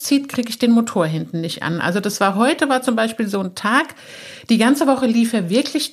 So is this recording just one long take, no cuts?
yes; 0 cuts

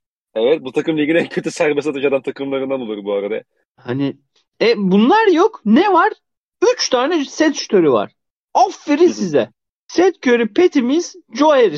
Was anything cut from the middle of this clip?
no; 0 cuts

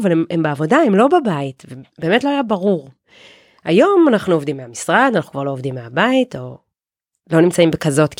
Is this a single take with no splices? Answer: yes; 0 cuts

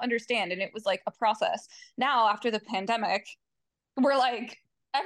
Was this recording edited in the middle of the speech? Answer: no; 0 cuts

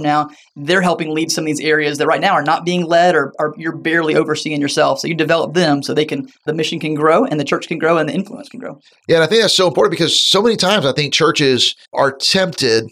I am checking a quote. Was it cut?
yes; 1 cut; at 11.9 s

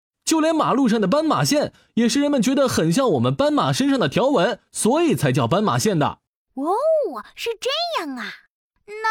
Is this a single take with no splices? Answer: no; 1 cut; at 6.3 s

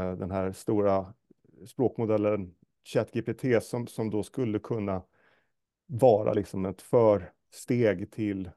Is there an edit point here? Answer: no; 0 cuts

